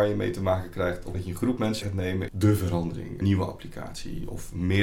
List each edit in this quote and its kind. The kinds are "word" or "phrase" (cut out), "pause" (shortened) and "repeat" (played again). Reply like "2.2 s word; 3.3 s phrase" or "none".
1.1 s word; 1.8 s word; 2.3 s word; 3.2 s word